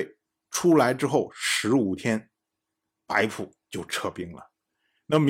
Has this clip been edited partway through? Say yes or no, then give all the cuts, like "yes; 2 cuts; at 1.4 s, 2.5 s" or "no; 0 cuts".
yes; 1 cut; at 3.6 s